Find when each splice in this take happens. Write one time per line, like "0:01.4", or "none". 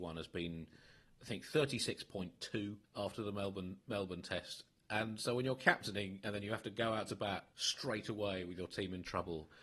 0:02.8
0:07.5